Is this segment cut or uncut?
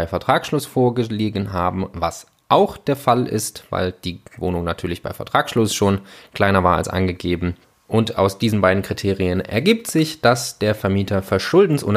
cut